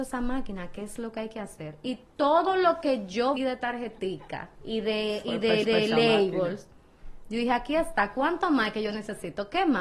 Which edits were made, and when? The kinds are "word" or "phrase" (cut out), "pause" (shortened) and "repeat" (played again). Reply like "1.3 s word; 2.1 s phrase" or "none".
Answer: 3.4 s word; 4.6 s pause; 5.6 s repeat